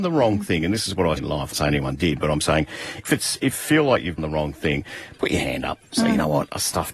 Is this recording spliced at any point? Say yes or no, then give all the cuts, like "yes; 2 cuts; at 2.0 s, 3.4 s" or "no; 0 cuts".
yes; 5 cuts; at 1.2 s, 1.5 s, 3.0 s, 3.5 s, 4.2 s